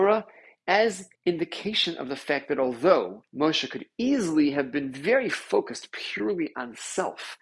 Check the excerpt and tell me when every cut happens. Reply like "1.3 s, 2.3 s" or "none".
1.1 s, 3.3 s